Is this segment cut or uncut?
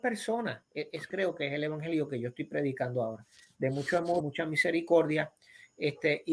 cut